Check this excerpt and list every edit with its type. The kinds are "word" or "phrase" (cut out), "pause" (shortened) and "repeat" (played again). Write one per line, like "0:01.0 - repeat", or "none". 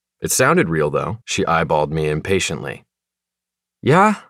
0:01.2 - pause